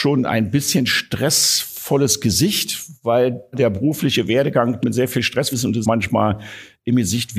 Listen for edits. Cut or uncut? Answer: cut